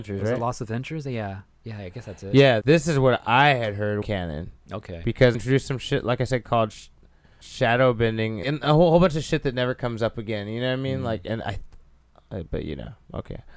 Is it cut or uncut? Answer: cut